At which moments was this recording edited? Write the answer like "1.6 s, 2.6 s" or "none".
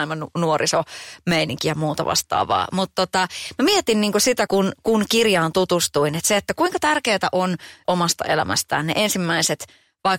4.5 s, 7.9 s